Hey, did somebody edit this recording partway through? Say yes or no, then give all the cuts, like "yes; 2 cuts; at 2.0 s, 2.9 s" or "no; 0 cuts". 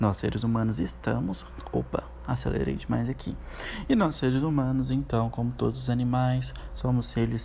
no; 0 cuts